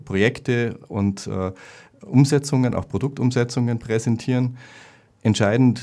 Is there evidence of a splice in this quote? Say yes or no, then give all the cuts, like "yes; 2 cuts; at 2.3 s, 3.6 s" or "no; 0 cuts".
no; 0 cuts